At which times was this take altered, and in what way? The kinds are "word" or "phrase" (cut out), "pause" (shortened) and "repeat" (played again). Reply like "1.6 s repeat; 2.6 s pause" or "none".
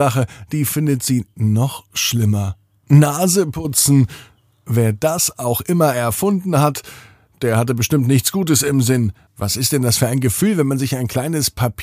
none

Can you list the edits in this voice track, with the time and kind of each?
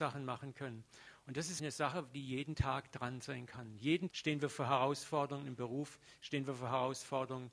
1.6 s word; 4.1 s word

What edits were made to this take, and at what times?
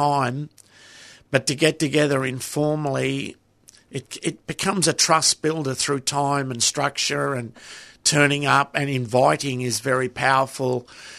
none

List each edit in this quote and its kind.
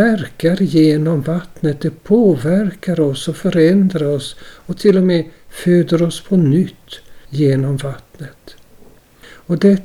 7.2 s pause

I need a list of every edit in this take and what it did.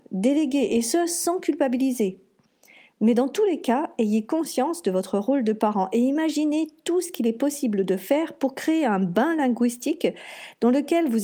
none

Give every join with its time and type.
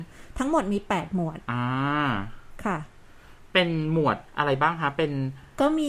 1.4 s pause; 4.3 s pause

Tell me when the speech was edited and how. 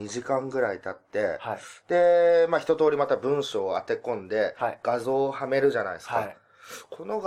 none

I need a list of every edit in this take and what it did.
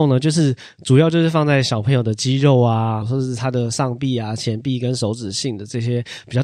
3.0 s word

